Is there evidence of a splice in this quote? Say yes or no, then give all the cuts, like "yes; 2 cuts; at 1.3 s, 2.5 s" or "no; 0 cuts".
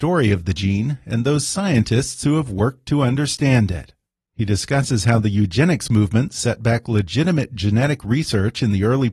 no; 0 cuts